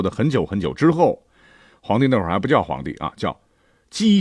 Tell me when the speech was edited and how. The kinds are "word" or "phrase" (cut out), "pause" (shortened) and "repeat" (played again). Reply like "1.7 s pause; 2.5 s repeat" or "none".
none